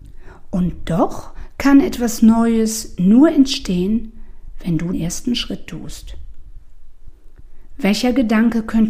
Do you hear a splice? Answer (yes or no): yes